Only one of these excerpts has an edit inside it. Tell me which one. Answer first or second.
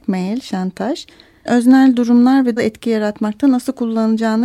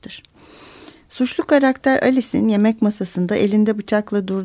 first